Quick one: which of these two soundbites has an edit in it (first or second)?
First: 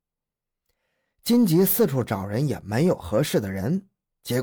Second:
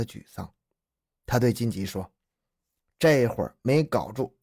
second